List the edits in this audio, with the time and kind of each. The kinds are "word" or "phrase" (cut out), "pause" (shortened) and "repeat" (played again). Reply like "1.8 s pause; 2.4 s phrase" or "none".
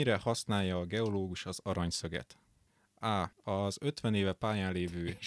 3.3 s pause